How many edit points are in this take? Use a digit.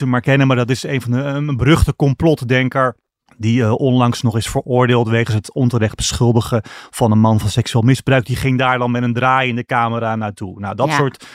1